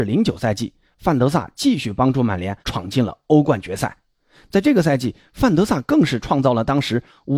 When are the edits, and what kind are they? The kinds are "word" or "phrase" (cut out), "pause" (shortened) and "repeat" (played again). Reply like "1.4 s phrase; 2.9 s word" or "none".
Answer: 2.6 s pause